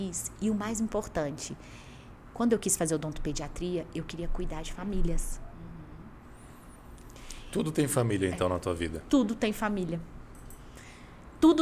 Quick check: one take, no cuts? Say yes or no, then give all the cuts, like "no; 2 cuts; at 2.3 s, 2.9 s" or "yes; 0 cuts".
yes; 0 cuts